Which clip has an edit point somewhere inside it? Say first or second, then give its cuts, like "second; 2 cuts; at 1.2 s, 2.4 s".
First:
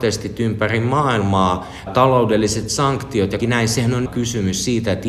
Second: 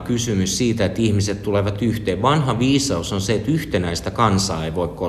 first; 3 cuts; at 1.9 s, 3.4 s, 4.1 s